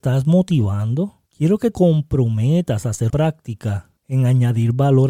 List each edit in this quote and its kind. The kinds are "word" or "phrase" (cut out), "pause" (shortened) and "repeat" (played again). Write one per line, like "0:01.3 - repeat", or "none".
0:01.3 - pause
0:01.7 - word
0:03.1 - word
0:04.0 - pause